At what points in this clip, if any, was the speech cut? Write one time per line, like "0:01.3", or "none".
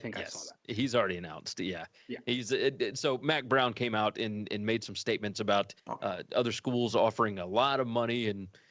0:05.8